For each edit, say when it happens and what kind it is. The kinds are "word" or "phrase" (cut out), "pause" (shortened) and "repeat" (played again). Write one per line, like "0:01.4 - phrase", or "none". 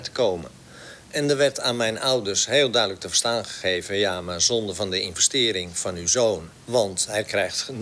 0:06.6 - pause